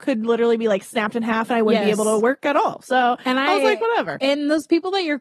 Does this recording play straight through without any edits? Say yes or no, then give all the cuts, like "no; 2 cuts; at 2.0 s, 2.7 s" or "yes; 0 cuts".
yes; 0 cuts